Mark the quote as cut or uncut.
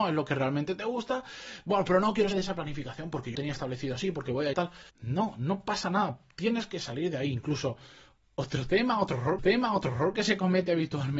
cut